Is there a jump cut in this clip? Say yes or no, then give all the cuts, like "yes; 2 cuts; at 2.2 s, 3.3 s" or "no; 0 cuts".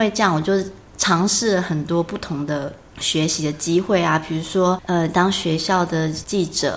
no; 0 cuts